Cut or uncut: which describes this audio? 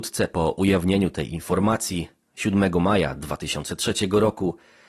uncut